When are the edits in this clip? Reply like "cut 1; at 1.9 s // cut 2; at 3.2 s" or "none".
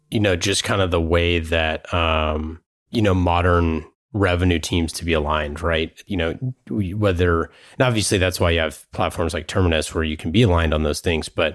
cut 1; at 2.8 s // cut 2; at 4.9 s // cut 3; at 6.1 s